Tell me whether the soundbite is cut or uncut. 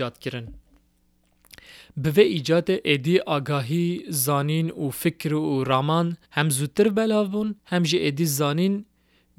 cut